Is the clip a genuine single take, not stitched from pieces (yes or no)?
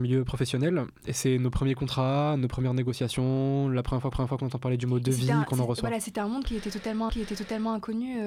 no